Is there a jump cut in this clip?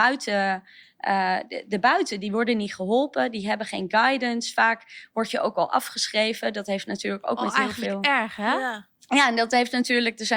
yes; 1 cut; at 9.0 s

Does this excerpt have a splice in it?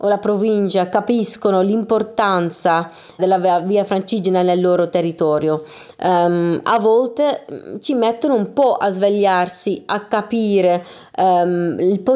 yes; 1 cut; at 3.2 s

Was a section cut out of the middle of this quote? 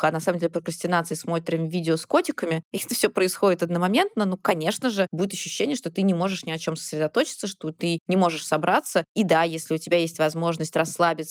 no; 0 cuts

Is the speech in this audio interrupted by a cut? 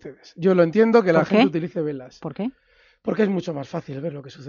no; 0 cuts

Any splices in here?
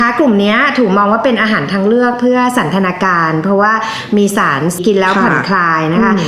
yes; 1 cut; at 4.8 s

